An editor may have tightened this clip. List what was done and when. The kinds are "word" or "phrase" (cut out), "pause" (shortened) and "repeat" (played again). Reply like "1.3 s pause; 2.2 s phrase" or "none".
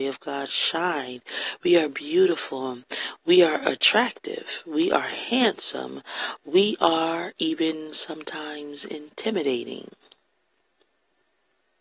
none